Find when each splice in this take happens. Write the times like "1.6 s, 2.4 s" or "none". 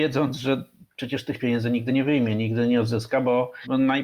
none